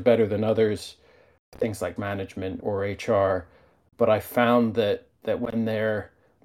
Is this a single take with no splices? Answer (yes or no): no